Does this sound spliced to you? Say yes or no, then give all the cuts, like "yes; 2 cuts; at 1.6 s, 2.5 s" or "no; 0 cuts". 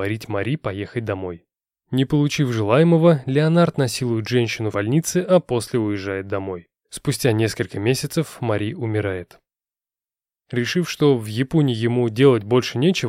yes; 1 cut; at 4.7 s